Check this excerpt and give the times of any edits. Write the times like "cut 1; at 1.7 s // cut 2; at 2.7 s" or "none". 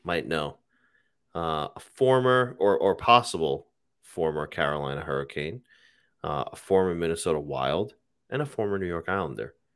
none